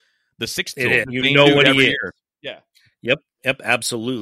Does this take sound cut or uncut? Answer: cut